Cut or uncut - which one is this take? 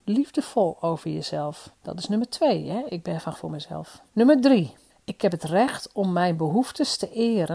cut